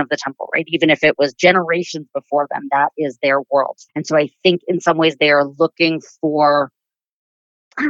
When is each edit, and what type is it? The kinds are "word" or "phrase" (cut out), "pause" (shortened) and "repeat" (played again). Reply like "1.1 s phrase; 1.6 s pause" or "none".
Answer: 3.9 s pause

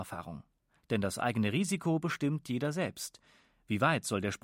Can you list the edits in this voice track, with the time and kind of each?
none

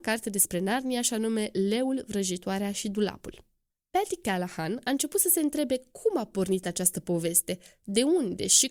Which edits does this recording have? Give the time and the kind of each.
none

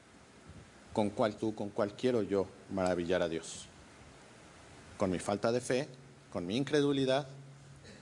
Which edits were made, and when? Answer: 1.4 s word

